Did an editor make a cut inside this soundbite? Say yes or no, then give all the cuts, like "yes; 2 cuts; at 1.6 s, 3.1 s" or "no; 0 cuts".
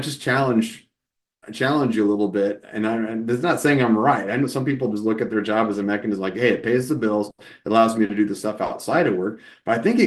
no; 0 cuts